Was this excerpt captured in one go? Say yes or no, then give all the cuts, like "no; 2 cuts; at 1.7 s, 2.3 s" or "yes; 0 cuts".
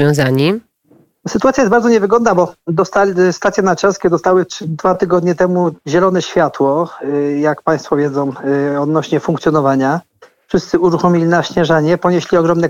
yes; 0 cuts